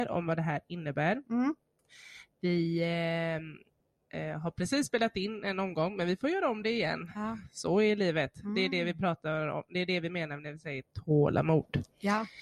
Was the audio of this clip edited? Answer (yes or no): no